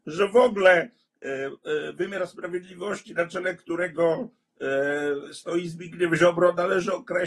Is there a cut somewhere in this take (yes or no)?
no